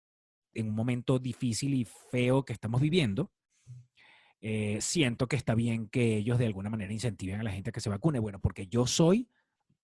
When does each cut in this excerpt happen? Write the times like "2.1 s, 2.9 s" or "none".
none